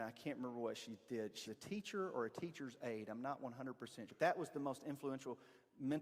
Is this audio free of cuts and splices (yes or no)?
no